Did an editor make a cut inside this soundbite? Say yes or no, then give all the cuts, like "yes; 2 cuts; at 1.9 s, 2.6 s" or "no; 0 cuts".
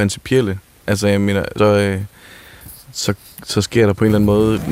yes; 1 cut; at 1.6 s